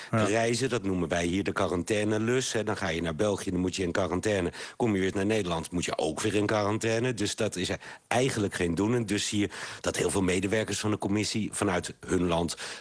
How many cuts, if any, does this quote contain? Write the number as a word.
one